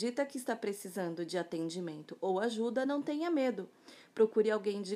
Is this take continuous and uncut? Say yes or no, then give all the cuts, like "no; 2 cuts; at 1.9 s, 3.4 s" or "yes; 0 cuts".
yes; 0 cuts